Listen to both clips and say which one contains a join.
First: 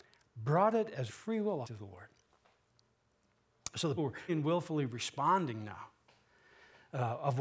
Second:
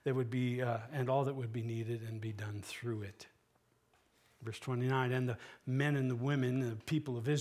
first; 4 cuts; at 1.1 s, 1.6 s, 4.0 s, 4.3 s

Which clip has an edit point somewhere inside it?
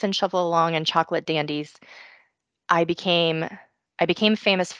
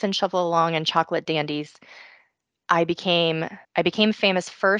second; 1 cut; at 3.6 s

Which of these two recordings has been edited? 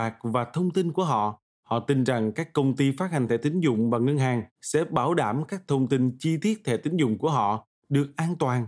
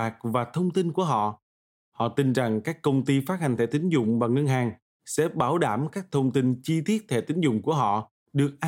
first; 2 cuts; at 1.5 s, 4.5 s

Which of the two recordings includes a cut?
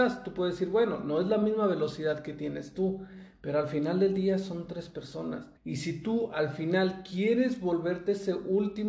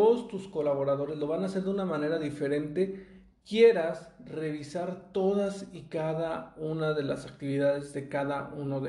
first; 1 cut; at 5.6 s

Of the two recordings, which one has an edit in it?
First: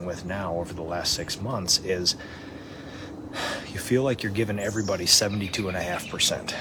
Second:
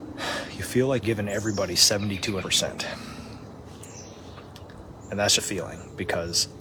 second; 3 cuts; at 1.0 s, 2.4 s, 5.4 s

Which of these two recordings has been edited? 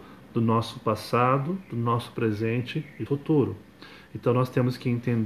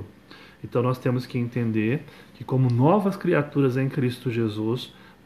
first; 1 cut; at 3.1 s

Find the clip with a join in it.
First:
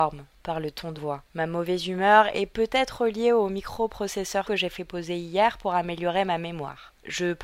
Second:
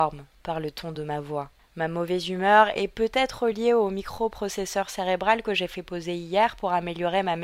first; 3 cuts; at 1.0 s, 1.3 s, 4.4 s

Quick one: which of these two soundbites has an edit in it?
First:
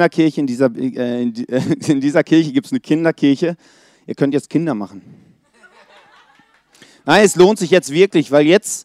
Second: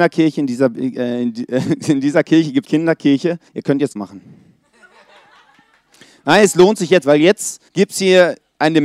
second; 5 cuts; at 2.6 s, 3.5 s, 4.0 s, 7.0 s, 7.7 s

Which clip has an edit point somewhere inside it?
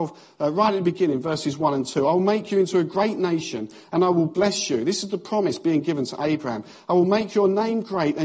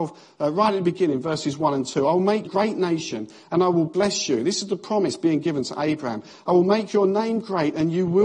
second; 1 cut; at 2.5 s

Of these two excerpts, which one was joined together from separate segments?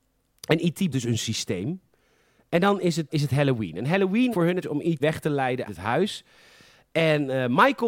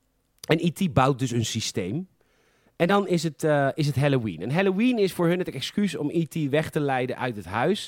first; 6 cuts; at 0.9 s, 3.1 s, 4.3 s, 4.6 s, 5.0 s, 5.7 s

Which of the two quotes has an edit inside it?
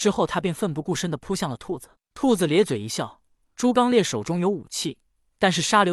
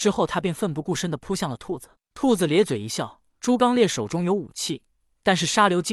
second; 1 cut; at 3.3 s

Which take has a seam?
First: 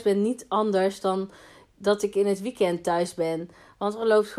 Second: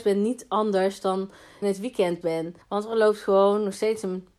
second; 3 cuts; at 1.6 s, 2.2 s, 2.6 s

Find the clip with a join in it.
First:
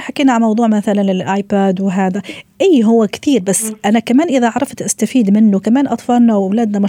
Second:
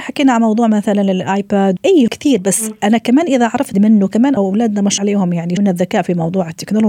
second; 6 cuts; at 1.8 s, 2.1 s, 3.7 s, 4.4 s, 5.0 s, 5.6 s

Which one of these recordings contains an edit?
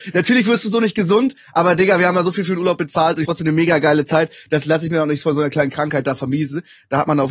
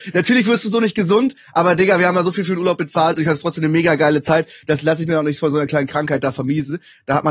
first; 1 cut; at 3.2 s

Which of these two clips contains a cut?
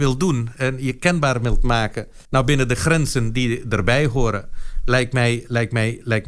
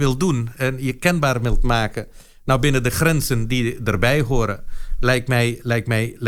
first; 1 cut; at 2.2 s

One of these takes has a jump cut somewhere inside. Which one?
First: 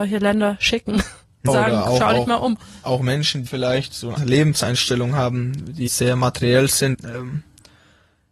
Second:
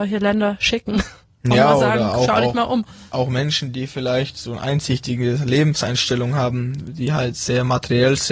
first; 5 cuts; at 1.5 s, 3.5 s, 4.2 s, 5.9 s, 6.9 s

